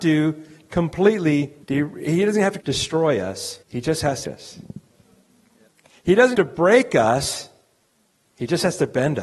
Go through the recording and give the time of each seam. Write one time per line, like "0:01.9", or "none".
0:01.6
0:02.6
0:03.6
0:04.2
0:05.7
0:06.3

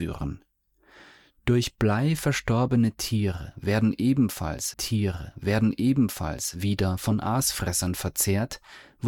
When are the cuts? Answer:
0:04.7

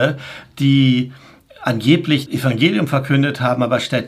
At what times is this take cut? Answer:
0:02.3

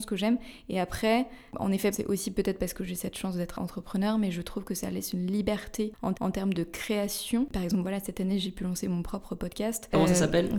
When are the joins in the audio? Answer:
0:01.9
0:06.1

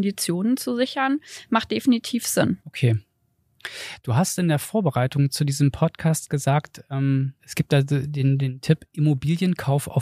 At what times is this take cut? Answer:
0:02.6
0:07.4

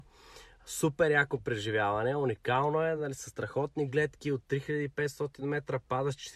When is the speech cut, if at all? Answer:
none

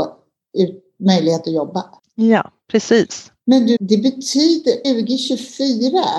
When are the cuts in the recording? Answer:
0:02.0
0:03.4
0:03.8
0:04.8

